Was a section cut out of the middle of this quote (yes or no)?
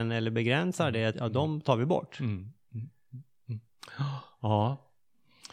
yes